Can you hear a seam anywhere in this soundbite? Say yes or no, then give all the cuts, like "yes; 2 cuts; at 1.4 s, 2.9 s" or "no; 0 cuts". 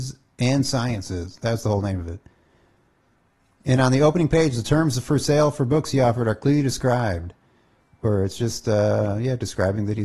no; 0 cuts